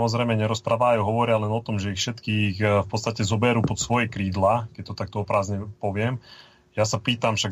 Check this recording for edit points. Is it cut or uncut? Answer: uncut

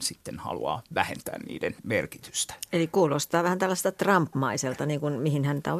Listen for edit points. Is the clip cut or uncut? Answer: cut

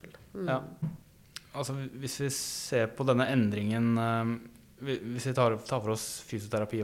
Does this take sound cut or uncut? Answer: uncut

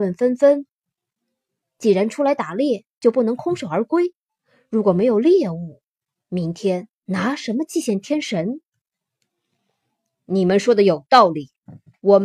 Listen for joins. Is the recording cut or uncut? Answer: uncut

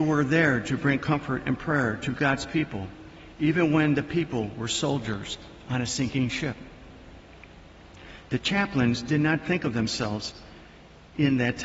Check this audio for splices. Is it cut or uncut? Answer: uncut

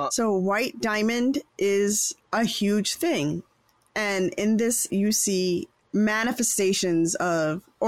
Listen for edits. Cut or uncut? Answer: cut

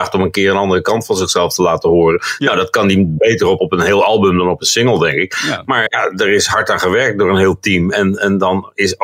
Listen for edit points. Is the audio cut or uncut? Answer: cut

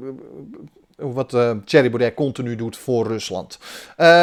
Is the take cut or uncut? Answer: uncut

